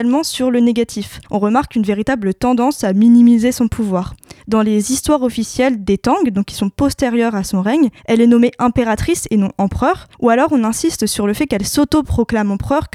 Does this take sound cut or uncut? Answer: cut